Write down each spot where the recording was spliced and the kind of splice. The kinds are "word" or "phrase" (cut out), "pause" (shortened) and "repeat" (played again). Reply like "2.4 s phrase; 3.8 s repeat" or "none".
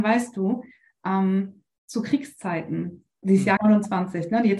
3.2 s word; 3.6 s word